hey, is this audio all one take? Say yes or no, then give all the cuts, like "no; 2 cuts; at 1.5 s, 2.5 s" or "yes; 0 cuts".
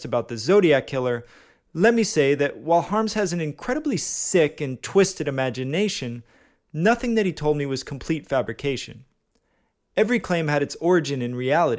yes; 0 cuts